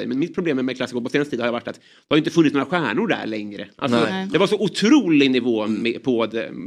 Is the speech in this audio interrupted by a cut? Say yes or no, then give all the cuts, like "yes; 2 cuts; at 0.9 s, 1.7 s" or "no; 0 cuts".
no; 0 cuts